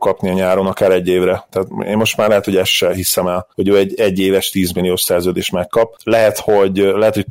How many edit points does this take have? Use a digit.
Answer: 1